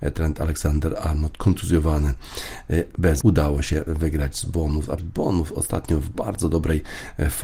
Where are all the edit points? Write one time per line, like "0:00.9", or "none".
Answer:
0:03.2
0:05.0